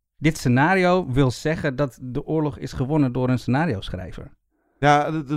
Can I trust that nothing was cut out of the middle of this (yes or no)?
yes